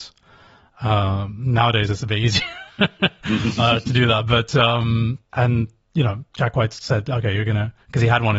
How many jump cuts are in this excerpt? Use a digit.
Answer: 1